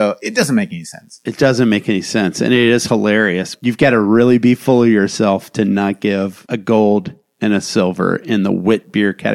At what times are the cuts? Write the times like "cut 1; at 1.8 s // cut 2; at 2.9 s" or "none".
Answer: none